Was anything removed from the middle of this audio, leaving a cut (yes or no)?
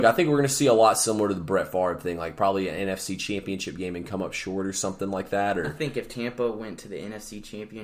no